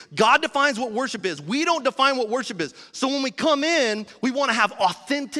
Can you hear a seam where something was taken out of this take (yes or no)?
no